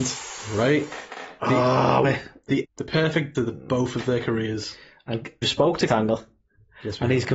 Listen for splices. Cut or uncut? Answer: cut